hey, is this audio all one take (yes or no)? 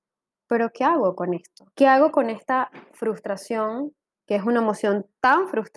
no